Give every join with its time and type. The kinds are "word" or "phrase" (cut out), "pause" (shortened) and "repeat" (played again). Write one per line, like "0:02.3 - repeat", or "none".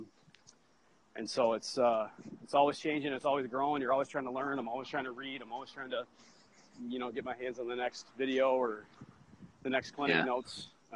none